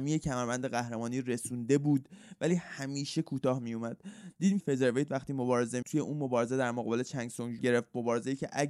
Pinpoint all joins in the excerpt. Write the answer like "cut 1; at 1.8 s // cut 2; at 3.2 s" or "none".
cut 1; at 4.6 s // cut 2; at 5.8 s // cut 3; at 7.6 s